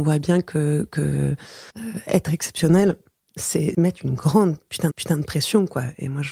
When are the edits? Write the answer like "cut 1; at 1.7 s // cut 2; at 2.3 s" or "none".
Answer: cut 1; at 1.7 s // cut 2; at 3.7 s // cut 3; at 4.9 s